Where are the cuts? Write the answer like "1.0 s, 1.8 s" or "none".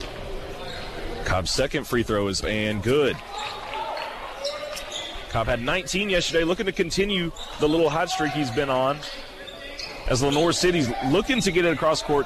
2.4 s